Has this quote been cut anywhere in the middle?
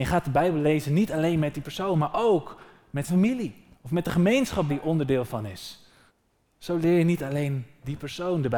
yes; 4 cuts; at 3.1 s, 3.7 s, 4.7 s, 6.1 s

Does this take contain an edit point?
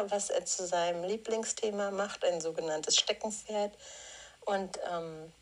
no; 0 cuts

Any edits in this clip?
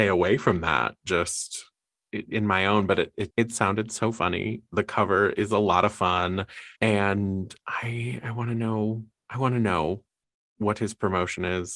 yes; 2 cuts; at 3.3 s, 6.8 s

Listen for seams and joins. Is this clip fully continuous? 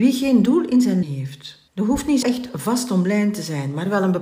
no; 3 cuts; at 1.0 s, 1.7 s, 2.2 s

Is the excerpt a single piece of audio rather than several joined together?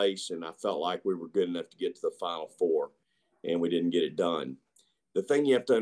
yes; 0 cuts

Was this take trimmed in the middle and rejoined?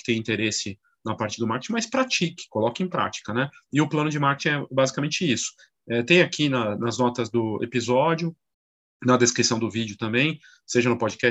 no; 0 cuts

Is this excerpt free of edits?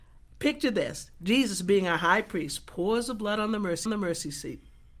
no; 1 cut; at 3.9 s

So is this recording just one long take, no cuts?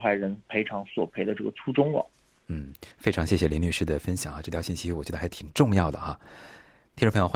no; 1 cut; at 2.9 s

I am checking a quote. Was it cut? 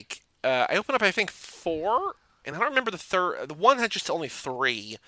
no; 0 cuts

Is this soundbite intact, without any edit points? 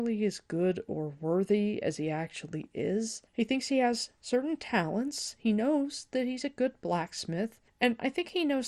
no; 1 cut; at 3.3 s

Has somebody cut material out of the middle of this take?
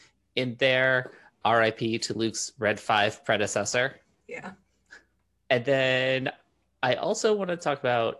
no; 0 cuts

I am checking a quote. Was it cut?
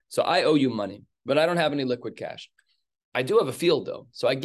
no; 0 cuts

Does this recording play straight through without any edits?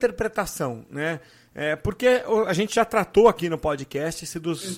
yes; 0 cuts

